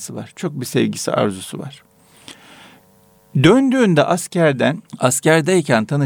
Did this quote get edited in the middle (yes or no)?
yes